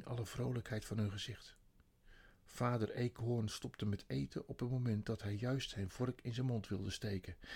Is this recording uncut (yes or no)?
yes